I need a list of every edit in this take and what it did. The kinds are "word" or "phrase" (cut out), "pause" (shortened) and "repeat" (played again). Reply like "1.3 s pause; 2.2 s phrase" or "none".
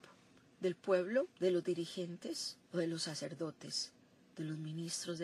1.3 s pause; 2.6 s pause